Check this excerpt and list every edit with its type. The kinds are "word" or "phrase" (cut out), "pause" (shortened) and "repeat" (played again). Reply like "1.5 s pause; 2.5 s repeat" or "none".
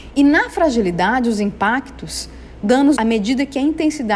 2.6 s word; 3.0 s word